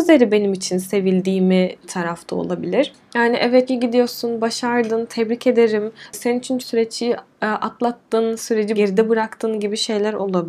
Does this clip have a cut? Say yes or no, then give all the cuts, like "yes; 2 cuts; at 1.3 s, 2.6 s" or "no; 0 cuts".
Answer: yes; 4 cuts; at 1.8 s, 3.7 s, 6.6 s, 8.7 s